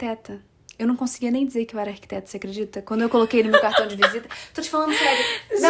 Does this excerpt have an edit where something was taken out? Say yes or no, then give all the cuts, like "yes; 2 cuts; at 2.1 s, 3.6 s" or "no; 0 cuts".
no; 0 cuts